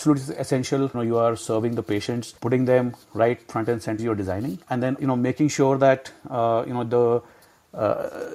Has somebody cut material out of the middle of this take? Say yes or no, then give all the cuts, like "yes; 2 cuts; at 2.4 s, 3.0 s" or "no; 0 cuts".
yes; 5 cuts; at 0.9 s, 2.4 s, 4.0 s, 4.6 s, 5.0 s